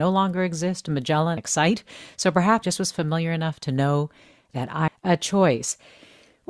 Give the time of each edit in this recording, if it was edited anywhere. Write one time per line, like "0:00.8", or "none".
0:01.4
0:02.6
0:04.9